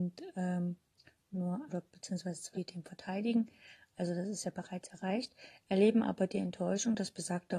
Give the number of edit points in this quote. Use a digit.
2